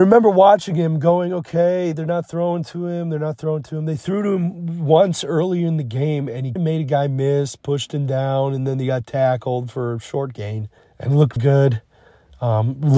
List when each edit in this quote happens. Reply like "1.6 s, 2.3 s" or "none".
6.6 s, 10.8 s, 11.4 s

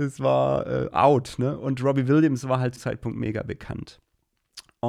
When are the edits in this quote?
2.8 s

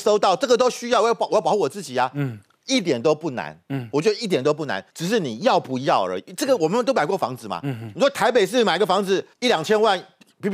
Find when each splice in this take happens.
4.9 s, 9.3 s

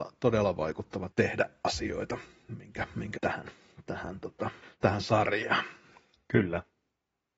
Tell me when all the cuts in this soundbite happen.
1.1 s, 3.2 s, 4.6 s

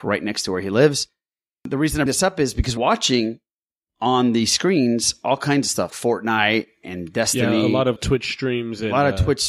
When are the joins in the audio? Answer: 2.1 s, 2.8 s, 5.9 s, 8.0 s

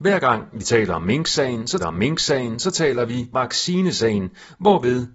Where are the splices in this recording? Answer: 1.8 s, 3.3 s

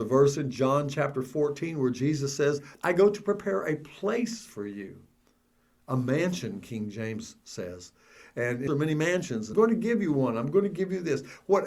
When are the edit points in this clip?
2.7 s, 8.7 s, 9.5 s

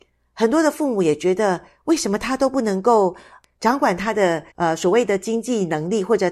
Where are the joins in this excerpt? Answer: 4.5 s

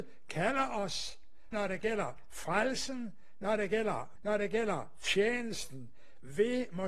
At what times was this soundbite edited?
1.5 s, 4.2 s

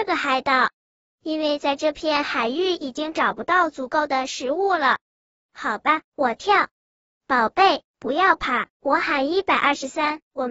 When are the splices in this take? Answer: none

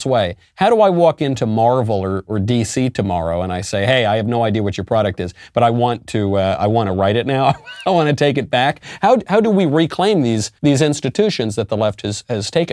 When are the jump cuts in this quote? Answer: 10.6 s

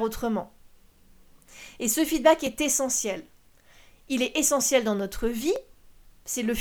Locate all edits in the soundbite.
none

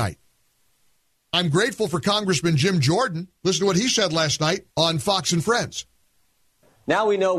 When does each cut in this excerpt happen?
3.4 s, 4.7 s

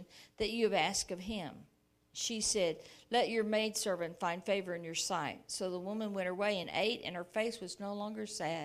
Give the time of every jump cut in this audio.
none

